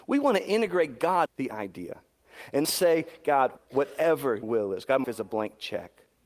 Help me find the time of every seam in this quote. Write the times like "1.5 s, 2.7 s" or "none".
1.3 s, 2.6 s, 3.6 s, 4.4 s, 5.0 s